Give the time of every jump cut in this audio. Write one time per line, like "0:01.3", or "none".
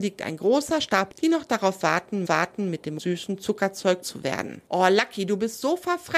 0:01.1
0:02.2
0:03.0
0:04.0
0:04.7